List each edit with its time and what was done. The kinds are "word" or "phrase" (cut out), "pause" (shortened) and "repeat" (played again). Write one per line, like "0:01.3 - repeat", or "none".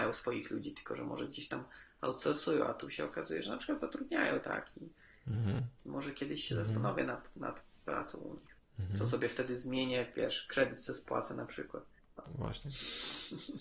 0:05.8 - pause